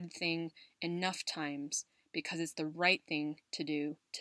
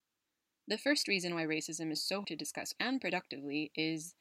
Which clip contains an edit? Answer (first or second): second